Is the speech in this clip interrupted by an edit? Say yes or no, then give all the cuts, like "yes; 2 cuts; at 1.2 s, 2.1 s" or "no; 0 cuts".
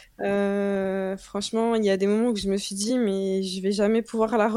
no; 0 cuts